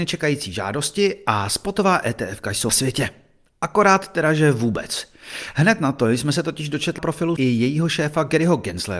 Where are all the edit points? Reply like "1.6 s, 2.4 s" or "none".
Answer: 2.7 s, 7.0 s, 7.4 s